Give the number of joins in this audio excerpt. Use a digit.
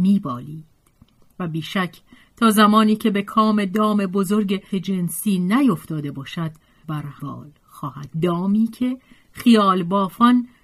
4